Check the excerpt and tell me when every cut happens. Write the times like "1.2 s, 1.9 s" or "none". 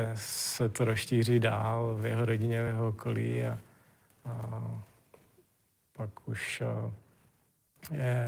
none